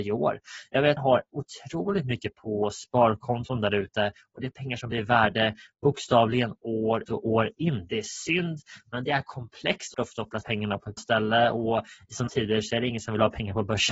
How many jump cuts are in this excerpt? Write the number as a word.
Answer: eight